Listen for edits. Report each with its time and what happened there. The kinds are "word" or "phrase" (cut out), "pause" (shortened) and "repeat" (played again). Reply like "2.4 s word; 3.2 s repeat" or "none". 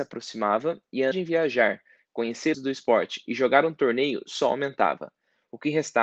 1.1 s word; 2.5 s phrase